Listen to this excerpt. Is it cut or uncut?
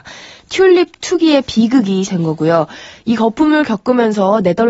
cut